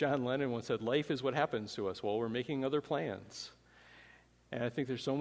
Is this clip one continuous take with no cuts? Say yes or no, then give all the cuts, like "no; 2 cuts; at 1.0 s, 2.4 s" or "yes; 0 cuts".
yes; 0 cuts